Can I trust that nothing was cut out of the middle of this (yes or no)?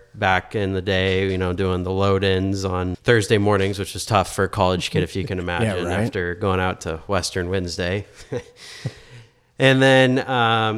no